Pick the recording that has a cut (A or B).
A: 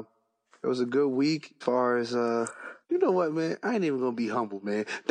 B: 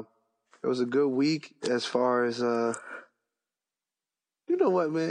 A